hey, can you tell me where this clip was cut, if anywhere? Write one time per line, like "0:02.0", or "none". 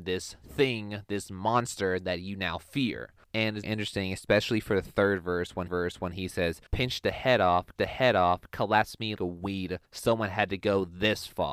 0:03.6
0:05.7
0:06.7
0:07.8
0:09.2
0:09.8